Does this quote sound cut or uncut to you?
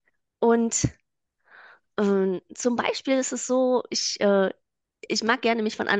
uncut